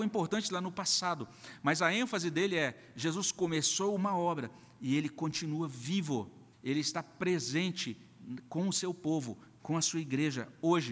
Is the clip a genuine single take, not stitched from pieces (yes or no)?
no